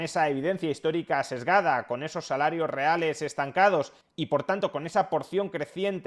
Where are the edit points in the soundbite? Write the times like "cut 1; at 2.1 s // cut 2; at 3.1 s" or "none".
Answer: none